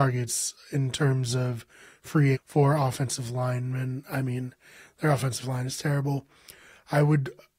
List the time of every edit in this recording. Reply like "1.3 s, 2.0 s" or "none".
2.3 s

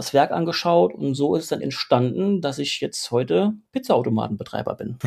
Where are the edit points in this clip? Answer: 1.6 s

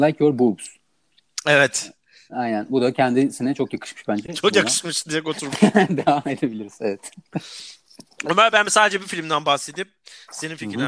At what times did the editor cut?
none

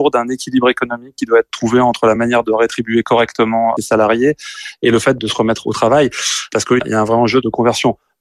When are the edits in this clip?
none

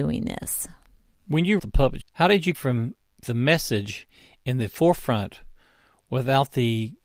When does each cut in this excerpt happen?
1.6 s, 2.0 s, 2.5 s, 3.2 s

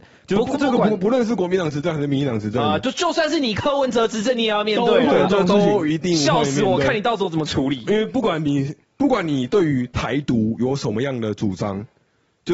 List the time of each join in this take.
8.8 s

